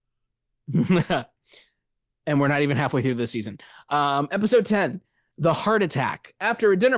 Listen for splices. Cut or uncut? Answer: uncut